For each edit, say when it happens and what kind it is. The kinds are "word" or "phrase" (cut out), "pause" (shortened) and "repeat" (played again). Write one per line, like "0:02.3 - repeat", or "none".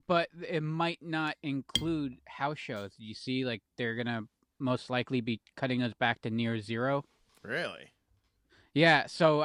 none